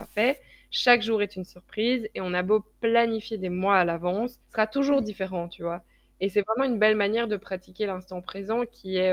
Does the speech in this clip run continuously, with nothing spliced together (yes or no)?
no